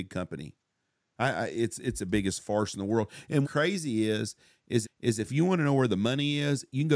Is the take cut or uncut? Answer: cut